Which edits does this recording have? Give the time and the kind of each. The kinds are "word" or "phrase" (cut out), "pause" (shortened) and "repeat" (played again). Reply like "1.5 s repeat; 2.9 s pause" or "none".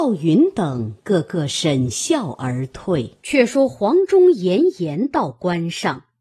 3.2 s pause